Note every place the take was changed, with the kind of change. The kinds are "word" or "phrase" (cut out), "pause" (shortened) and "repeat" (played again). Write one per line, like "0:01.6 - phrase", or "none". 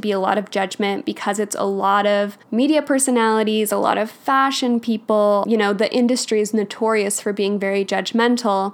0:02.4 - pause